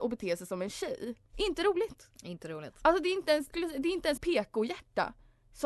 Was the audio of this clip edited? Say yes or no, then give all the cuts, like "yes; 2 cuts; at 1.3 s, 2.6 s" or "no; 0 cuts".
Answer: yes; 3 cuts; at 1.3 s, 3.5 s, 4.2 s